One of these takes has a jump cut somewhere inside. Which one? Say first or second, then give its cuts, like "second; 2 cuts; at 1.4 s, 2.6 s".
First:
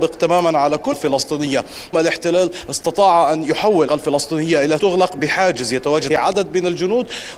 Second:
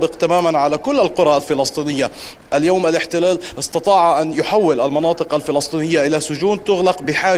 first; 5 cuts; at 0.9 s, 1.9 s, 3.9 s, 4.8 s, 6.1 s